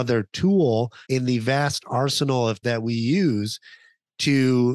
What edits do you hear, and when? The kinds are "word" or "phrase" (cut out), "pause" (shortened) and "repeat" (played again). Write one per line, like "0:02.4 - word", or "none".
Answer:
0:01.0 - pause
0:02.6 - word